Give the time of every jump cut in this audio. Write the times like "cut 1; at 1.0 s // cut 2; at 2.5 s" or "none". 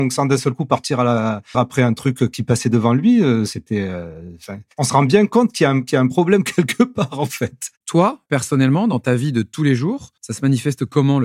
cut 1; at 1.5 s // cut 2; at 4.7 s // cut 3; at 8.3 s // cut 4; at 10.2 s